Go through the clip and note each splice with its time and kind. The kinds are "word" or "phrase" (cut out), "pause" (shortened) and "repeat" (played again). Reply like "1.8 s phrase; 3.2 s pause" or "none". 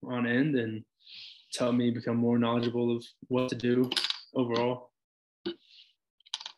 none